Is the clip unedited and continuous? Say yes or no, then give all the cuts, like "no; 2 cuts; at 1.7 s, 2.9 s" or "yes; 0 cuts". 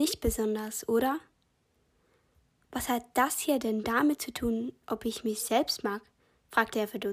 yes; 0 cuts